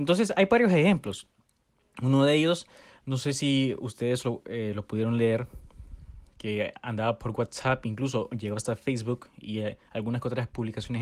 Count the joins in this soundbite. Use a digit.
0